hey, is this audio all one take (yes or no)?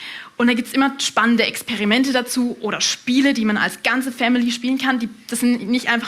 yes